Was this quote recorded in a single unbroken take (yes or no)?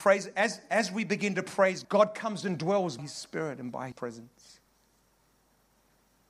no